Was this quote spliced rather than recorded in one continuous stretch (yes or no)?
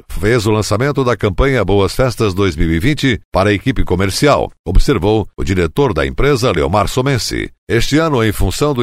no